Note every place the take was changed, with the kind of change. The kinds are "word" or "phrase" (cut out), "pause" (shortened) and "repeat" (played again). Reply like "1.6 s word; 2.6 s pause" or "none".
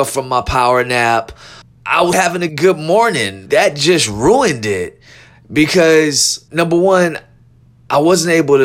1.6 s pause; 2.1 s word; 2.5 s word; 3.5 s word; 6.5 s pause